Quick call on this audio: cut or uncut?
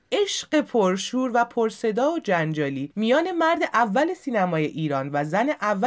uncut